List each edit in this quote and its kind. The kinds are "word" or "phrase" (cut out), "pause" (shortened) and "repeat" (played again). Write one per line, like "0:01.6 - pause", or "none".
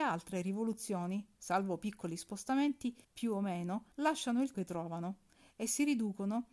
0:03.0 - pause
0:03.9 - pause
0:04.5 - word